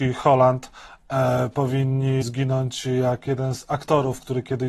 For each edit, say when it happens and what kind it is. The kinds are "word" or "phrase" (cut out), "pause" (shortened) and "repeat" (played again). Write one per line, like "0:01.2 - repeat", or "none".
0:02.2 - word